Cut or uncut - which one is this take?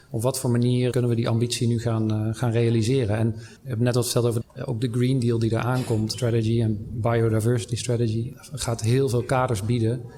cut